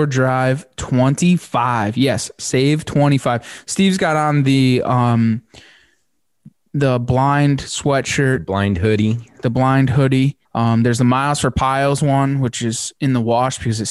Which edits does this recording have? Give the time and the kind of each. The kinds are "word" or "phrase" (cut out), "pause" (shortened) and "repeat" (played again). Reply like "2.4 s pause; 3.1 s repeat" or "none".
10.4 s pause

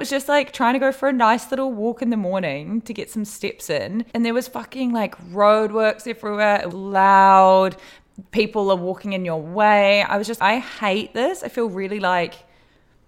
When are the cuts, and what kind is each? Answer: 4.1 s pause; 6.7 s word; 10.4 s word

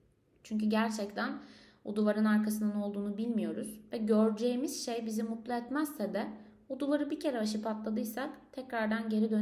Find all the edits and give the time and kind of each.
none

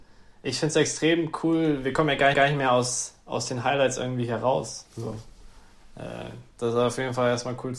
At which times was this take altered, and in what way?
2.3 s repeat; 6.5 s pause

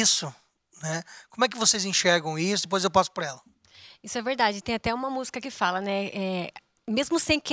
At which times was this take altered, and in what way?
none

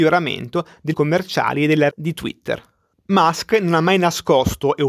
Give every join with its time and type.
0.9 s word; 1.9 s word

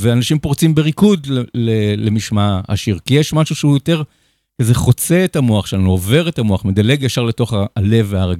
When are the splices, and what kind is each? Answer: none

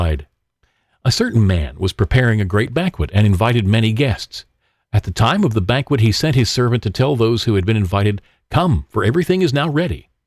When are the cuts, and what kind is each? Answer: none

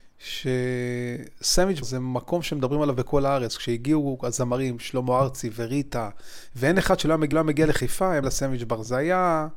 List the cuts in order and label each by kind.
1.8 s word; 7.3 s repeat; 8.2 s word

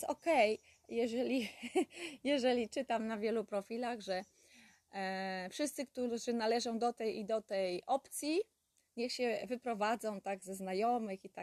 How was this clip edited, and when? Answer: none

